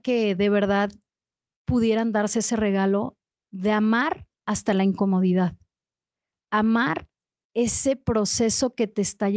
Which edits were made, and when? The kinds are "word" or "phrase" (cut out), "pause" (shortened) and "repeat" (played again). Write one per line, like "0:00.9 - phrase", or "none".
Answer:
none